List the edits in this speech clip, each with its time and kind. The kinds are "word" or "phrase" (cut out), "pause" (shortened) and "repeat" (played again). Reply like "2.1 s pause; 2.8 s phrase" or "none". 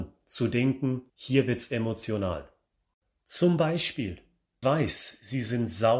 1.1 s pause; 4.6 s word